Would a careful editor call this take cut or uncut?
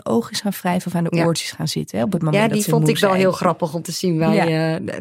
uncut